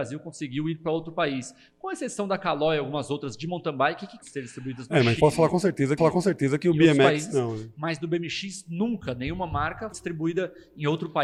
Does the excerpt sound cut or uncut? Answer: cut